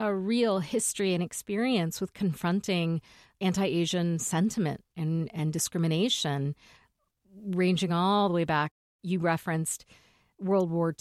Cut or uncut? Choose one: uncut